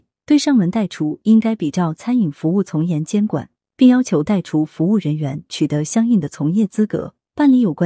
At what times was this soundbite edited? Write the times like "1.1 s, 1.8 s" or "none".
none